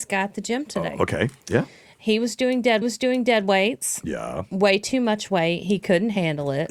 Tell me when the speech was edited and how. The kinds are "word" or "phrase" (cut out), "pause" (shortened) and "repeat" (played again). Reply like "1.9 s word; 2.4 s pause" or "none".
1.4 s pause; 2.8 s repeat